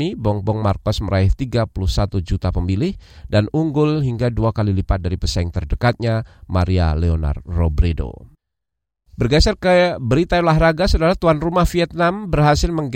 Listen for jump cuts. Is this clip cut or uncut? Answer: uncut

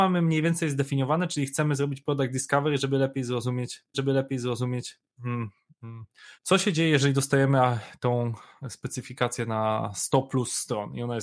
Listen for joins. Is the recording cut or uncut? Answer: cut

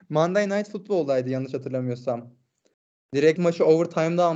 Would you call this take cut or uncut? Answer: cut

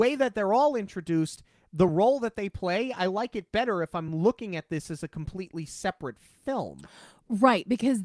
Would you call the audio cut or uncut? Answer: uncut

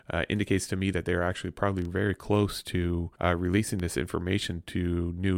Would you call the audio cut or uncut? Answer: cut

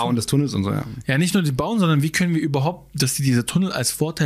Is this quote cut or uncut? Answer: uncut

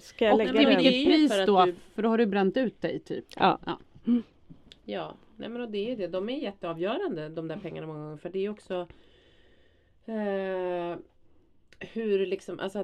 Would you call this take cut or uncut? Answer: uncut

